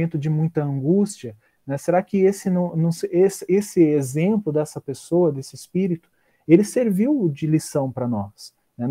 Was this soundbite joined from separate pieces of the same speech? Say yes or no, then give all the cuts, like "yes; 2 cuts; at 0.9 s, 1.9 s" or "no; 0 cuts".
no; 0 cuts